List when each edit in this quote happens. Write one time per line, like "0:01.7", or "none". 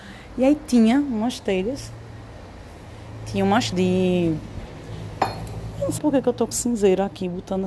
0:03.7
0:06.0
0:06.5